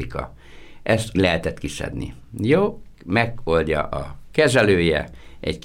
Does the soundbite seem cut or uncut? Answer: cut